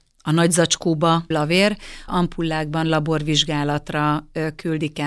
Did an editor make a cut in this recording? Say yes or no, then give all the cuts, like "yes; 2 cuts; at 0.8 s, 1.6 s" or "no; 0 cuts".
yes; 2 cuts; at 1.3 s, 2.1 s